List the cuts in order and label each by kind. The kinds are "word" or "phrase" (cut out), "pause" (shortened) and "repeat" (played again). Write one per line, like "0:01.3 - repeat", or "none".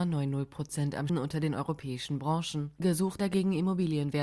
0:01.1 - word
0:03.2 - word